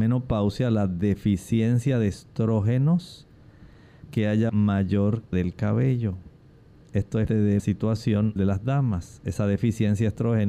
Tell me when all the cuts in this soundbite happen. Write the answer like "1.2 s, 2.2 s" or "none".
4.1 s, 4.5 s, 5.3 s, 7.3 s, 7.6 s, 8.4 s